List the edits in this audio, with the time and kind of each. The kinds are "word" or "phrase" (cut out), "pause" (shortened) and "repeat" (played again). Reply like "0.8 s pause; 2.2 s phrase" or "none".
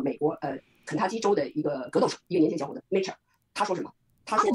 2.8 s word

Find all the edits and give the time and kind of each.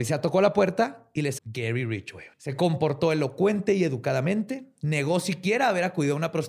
1.4 s word; 2.3 s pause

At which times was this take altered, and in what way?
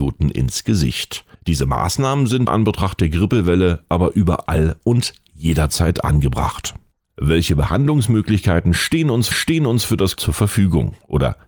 1.3 s pause; 2.5 s word; 9.3 s repeat; 10.2 s word

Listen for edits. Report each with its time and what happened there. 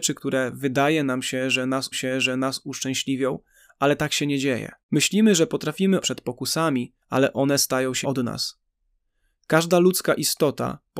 1.9 s repeat; 4.8 s pause; 6.0 s phrase; 7.0 s pause; 8.0 s word

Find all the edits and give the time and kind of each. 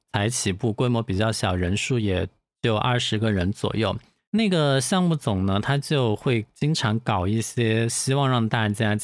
none

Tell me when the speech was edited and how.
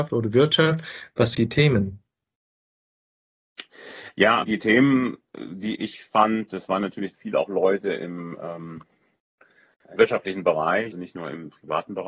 1.3 s word; 4.4 s word; 7.1 s word; 10.0 s word; 10.9 s word

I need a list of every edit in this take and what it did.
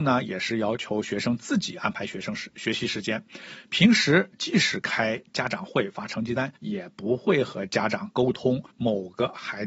6.6 s pause; 8.7 s pause

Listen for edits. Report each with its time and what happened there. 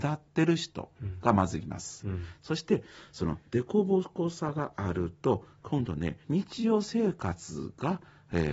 6.2 s pause

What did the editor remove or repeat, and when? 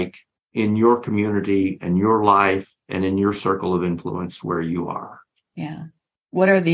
none

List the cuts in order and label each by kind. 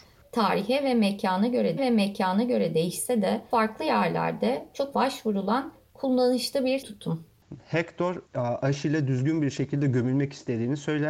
1.8 s repeat; 3.5 s word; 4.9 s phrase; 6.8 s word; 8.3 s pause

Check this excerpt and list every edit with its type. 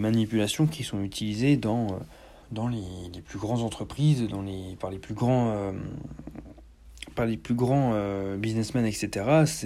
2.4 s pause

